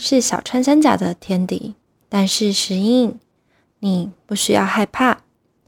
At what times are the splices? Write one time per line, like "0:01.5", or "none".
0:02.0